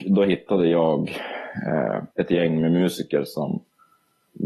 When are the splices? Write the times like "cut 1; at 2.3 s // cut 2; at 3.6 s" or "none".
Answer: cut 1; at 2.1 s